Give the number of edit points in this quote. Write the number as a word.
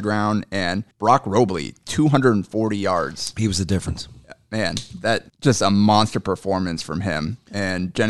two